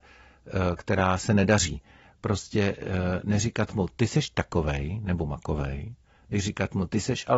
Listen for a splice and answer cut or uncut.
uncut